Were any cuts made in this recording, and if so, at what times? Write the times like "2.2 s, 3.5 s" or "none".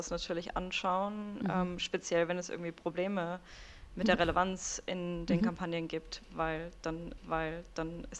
7.2 s